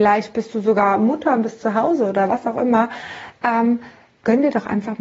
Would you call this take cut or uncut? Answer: uncut